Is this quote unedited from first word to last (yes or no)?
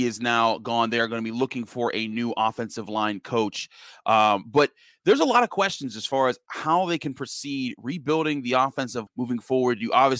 no